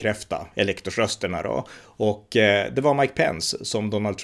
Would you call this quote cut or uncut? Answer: uncut